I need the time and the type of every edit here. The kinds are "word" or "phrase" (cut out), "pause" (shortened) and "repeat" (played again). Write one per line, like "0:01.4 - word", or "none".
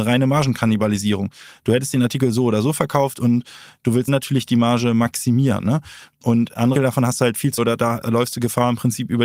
0:04.1 - word
0:06.7 - word
0:07.6 - word